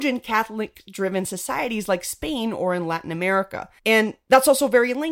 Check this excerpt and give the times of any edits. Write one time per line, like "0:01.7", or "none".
0:03.8